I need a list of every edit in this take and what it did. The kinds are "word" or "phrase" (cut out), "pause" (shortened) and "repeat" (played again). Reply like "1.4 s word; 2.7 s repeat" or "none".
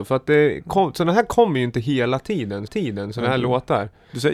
2.7 s repeat

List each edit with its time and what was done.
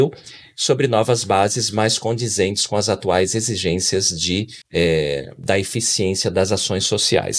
4.6 s pause

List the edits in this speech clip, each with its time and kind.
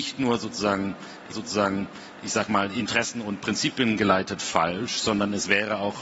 1.3 s repeat

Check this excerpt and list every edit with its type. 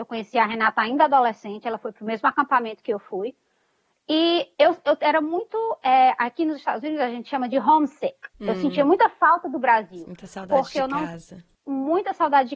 4.5 s pause; 8.3 s pause; 11.5 s pause

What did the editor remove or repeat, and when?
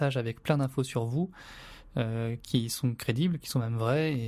none

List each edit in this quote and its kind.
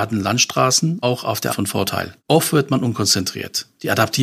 1.0 s word; 1.5 s word; 2.2 s pause

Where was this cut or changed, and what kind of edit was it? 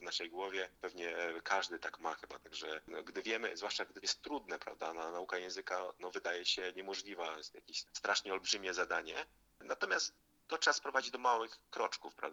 4.0 s word

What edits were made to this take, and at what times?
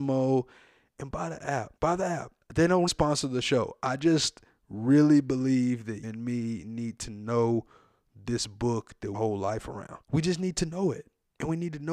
1.8 s pause; 2.4 s pause; 2.9 s word; 6.0 s word; 9.1 s phrase; 10.0 s pause

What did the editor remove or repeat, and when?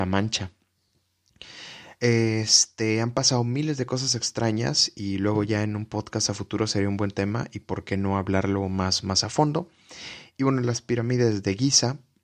none

